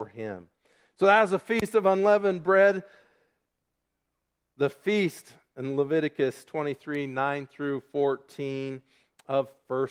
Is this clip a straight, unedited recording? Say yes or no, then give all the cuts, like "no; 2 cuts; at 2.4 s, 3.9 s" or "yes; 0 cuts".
yes; 0 cuts